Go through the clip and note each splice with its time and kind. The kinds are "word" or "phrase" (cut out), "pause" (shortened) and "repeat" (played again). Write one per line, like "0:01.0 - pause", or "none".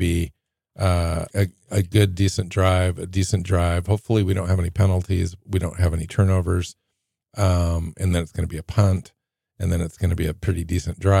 0:01.3 - word